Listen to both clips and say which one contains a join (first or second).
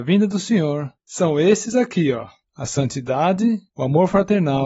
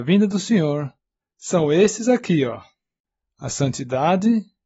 first